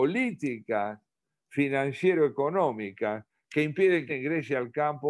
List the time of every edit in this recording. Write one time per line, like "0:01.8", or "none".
0:04.1